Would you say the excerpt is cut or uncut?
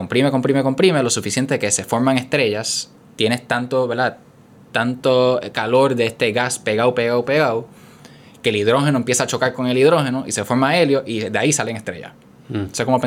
uncut